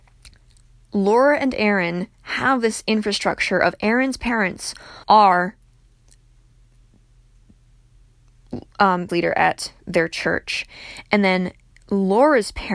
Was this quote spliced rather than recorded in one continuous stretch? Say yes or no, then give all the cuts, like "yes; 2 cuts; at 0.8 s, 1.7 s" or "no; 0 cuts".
yes; 2 cuts; at 5.0 s, 9.1 s